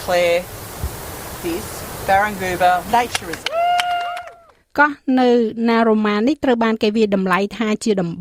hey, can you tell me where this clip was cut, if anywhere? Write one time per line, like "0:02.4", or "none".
0:02.9
0:04.6